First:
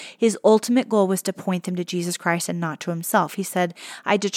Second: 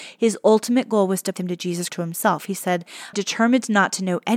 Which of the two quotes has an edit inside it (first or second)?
second